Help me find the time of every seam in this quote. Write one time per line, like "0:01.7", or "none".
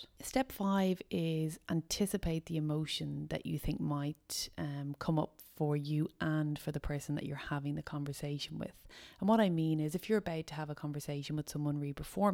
none